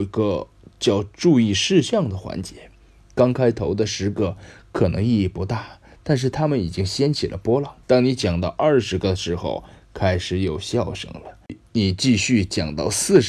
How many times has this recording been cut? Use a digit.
1